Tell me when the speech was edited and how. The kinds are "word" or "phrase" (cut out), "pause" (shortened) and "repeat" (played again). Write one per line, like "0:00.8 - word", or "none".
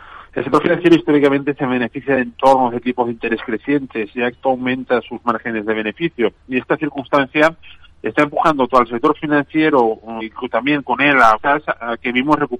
0:04.3 - word
0:08.7 - word
0:10.2 - word
0:11.4 - word